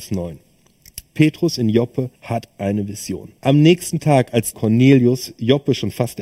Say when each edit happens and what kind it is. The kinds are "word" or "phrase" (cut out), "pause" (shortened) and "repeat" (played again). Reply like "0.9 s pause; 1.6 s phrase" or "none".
2.2 s pause; 3.4 s pause; 4.5 s phrase